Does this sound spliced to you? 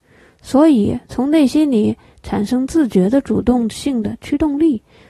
no; 0 cuts

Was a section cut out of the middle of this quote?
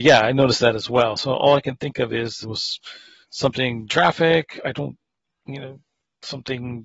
yes; 2 cuts; at 2.4 s, 3.9 s

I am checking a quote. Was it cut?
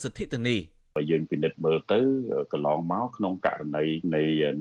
no; 0 cuts

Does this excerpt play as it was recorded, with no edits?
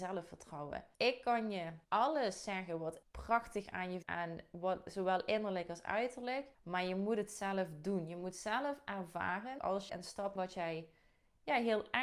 no; 8 cuts; at 0.9 s, 1.8 s, 3.0 s, 4.0 s, 6.5 s, 9.6 s, 9.9 s, 10.4 s

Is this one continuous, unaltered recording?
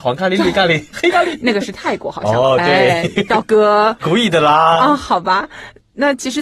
no; 1 cut; at 4.0 s

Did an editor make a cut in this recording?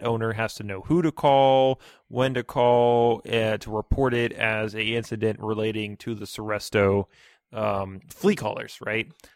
no; 0 cuts

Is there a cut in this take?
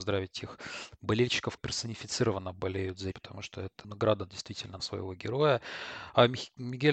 yes; 4 cuts; at 1.6 s, 3.1 s, 3.8 s, 4.8 s

